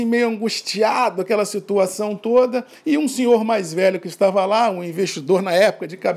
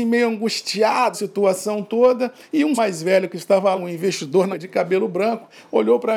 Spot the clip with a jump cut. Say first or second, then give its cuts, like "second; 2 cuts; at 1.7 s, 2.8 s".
second; 4 cuts; at 1.1 s, 2.8 s, 3.8 s, 4.5 s